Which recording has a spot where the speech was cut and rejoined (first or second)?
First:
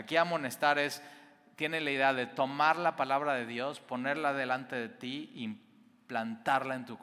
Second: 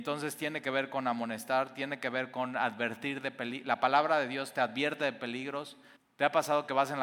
second